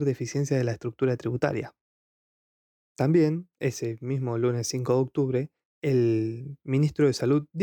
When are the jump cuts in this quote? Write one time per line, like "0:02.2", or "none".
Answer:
none

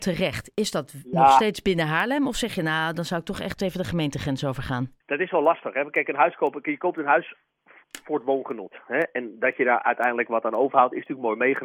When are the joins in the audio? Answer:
0:05.0

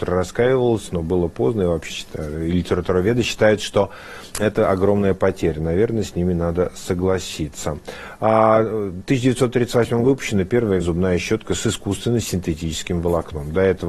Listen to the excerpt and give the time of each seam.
0:01.9
0:04.3
0:10.0
0:10.8

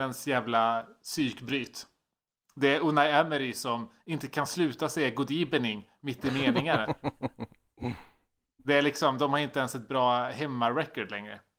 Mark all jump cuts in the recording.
none

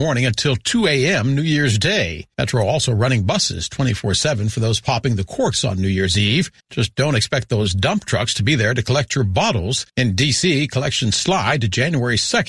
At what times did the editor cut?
0:02.3
0:06.6
0:09.9

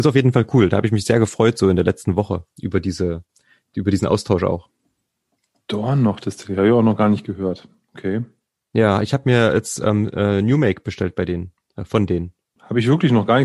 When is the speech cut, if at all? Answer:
none

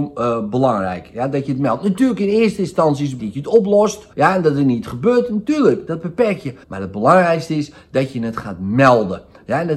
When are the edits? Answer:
0:03.2
0:04.1
0:06.6

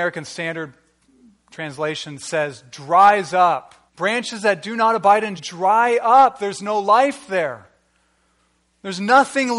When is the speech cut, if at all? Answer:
0:03.9
0:05.4

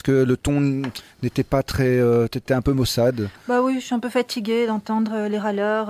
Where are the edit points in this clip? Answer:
none

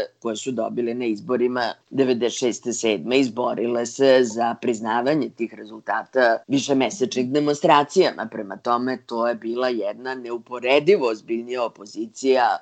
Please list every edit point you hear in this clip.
0:01.8
0:06.4

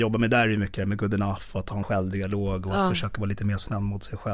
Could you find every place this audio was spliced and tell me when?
0:01.8

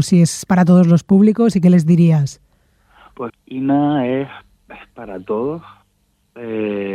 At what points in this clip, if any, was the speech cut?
0:03.3

